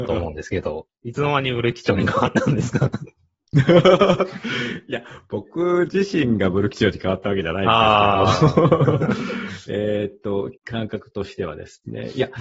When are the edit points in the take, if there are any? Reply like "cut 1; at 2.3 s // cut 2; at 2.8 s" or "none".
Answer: cut 1; at 10.6 s